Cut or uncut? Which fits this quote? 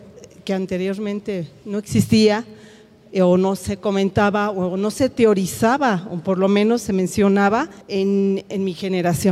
cut